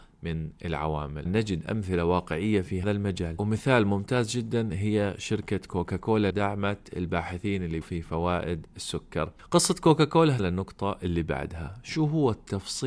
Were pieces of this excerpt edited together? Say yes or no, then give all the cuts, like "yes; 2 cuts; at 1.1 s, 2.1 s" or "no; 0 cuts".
yes; 5 cuts; at 1.2 s, 2.8 s, 6.3 s, 7.8 s, 10.4 s